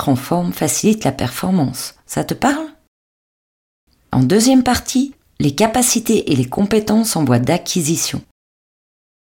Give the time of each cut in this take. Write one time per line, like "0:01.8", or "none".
none